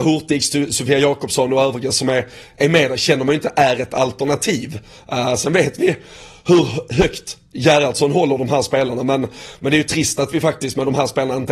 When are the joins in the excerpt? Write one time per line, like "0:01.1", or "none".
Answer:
none